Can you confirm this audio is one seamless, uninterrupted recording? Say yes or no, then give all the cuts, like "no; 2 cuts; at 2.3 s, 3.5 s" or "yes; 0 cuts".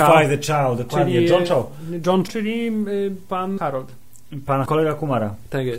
no; 3 cuts; at 2.3 s, 3.6 s, 4.7 s